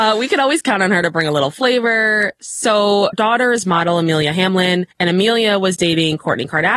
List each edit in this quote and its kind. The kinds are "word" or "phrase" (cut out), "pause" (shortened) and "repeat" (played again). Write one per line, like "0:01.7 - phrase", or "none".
0:03.1 - word
0:04.9 - pause